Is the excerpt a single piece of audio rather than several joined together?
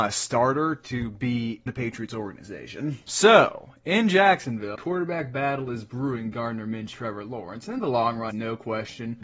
no; 5 cuts; at 1.7 s, 4.7 s, 6.3 s, 6.9 s, 8.3 s

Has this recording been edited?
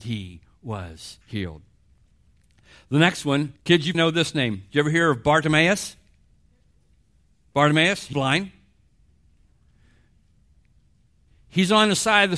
yes; 4 cuts; at 1.2 s, 3.6 s, 3.9 s, 8.1 s

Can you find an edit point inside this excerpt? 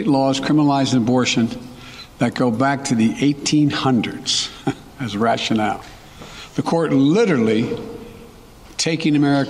no; 0 cuts

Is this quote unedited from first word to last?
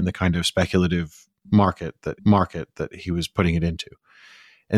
no; 1 cut; at 2.2 s

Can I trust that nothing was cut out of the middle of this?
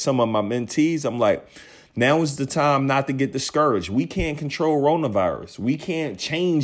yes; 0 cuts

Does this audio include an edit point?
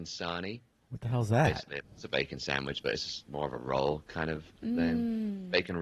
yes; 2 cuts; at 1.8 s, 3.3 s

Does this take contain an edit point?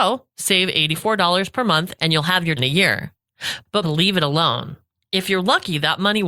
yes; 2 cuts; at 2.6 s, 3.8 s

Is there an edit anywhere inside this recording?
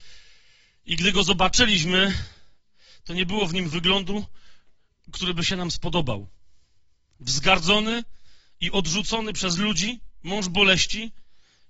no; 0 cuts

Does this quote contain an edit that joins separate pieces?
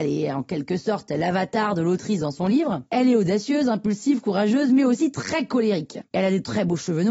no; 0 cuts

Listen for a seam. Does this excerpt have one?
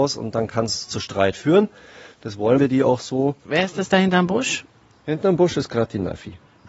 yes; 1 cut; at 2.6 s

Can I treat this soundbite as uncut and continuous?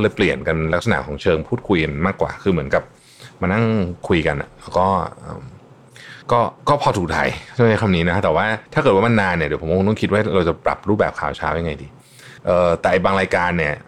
no; 4 cuts; at 6.2 s, 6.6 s, 8.7 s, 12.4 s

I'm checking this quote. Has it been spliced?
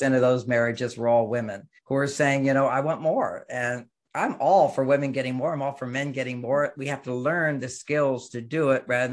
yes; 1 cut; at 1.8 s

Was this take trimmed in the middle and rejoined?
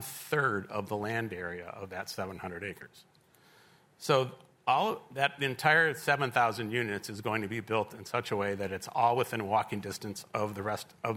no; 0 cuts

